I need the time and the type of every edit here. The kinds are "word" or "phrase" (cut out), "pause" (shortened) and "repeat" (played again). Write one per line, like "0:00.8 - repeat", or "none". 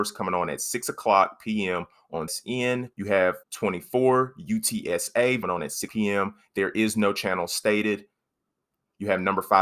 0:02.3 - word
0:02.9 - pause
0:03.4 - pause
0:05.4 - phrase
0:05.9 - word